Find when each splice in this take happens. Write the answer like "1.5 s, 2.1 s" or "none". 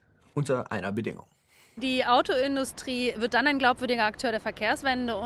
none